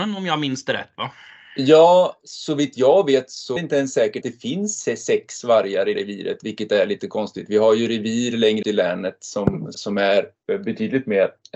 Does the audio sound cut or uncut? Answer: cut